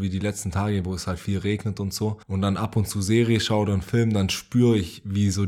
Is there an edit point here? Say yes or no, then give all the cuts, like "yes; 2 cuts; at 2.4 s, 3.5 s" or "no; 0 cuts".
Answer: yes; 1 cut; at 2.2 s